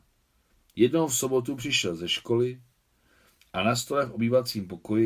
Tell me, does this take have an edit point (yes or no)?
no